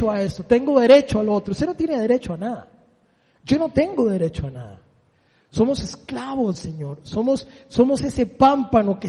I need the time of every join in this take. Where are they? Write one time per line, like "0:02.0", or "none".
0:06.5